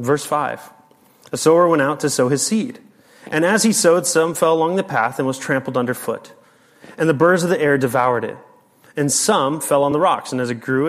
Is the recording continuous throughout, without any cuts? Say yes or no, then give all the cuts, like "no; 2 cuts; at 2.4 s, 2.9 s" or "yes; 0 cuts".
yes; 0 cuts